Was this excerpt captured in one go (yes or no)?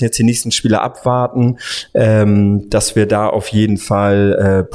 yes